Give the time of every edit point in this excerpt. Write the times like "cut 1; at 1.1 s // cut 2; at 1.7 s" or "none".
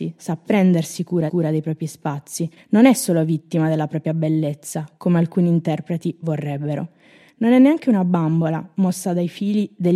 cut 1; at 1.3 s // cut 2; at 2.6 s

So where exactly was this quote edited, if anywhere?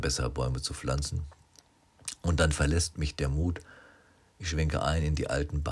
none

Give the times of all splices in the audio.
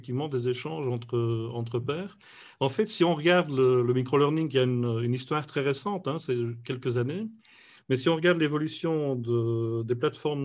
none

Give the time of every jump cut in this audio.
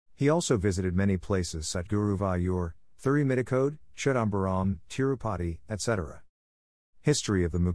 cut 1; at 1.8 s

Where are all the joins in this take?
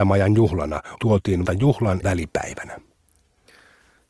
cut 1; at 1.0 s // cut 2; at 1.4 s // cut 3; at 2.0 s

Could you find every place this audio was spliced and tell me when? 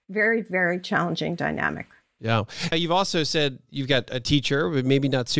cut 1; at 2.7 s

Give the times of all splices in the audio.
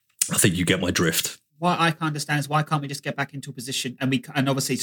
cut 1; at 1.5 s

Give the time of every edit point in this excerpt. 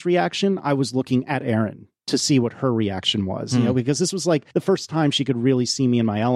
cut 1; at 4.5 s

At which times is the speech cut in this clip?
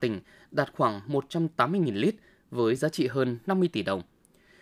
none

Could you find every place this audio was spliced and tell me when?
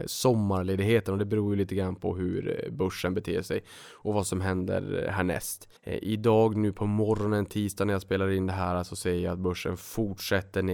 cut 1; at 5.8 s

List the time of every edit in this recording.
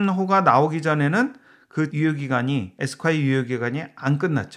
cut 1; at 1.9 s

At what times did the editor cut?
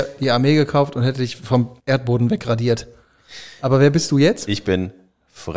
cut 1; at 1.8 s

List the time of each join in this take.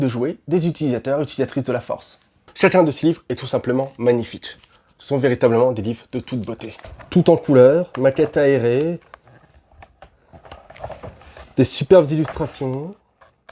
none

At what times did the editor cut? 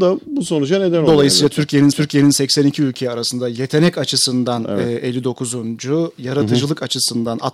cut 1; at 1.9 s

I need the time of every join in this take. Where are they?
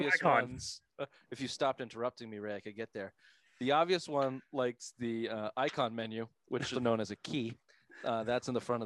cut 1; at 6.7 s

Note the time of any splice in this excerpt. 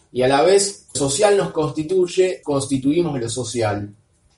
cut 1; at 0.9 s // cut 2; at 2.4 s

